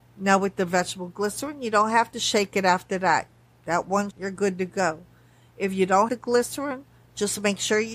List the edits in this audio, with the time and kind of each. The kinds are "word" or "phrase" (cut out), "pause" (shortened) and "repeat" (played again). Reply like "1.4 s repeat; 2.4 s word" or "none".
4.1 s word; 6.1 s word